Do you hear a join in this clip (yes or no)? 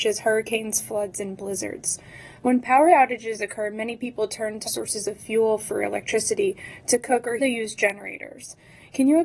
yes